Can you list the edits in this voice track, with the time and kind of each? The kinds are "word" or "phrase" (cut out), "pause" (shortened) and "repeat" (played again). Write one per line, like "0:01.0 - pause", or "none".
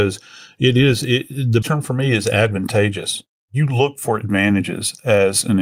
0:01.6 - word